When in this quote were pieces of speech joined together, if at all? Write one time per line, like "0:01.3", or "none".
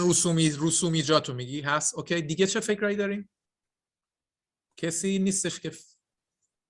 0:03.6